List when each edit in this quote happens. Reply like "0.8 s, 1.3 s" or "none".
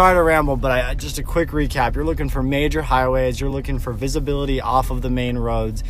none